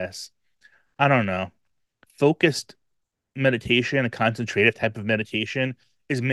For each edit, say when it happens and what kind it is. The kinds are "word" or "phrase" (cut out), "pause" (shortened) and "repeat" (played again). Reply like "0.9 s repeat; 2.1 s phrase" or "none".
2.0 s word